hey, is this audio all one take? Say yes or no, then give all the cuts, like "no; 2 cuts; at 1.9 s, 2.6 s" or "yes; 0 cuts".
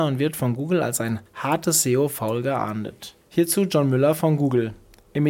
no; 2 cuts; at 1.3 s, 3.2 s